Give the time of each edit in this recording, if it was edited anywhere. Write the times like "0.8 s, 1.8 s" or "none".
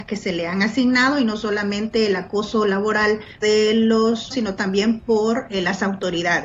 3.4 s, 4.3 s